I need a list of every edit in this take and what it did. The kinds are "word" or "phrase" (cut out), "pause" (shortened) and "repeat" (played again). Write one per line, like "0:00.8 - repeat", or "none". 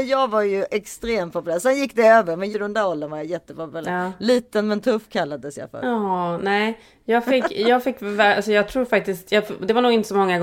0:02.5 - word